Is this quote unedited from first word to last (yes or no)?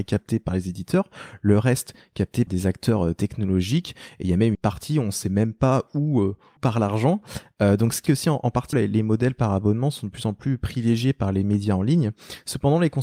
no